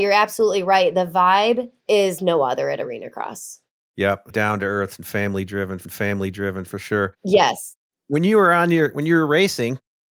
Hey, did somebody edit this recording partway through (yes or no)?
yes